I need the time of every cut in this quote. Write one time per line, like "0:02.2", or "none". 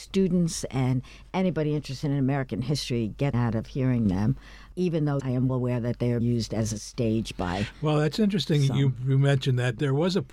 0:03.3
0:05.2
0:05.5
0:06.2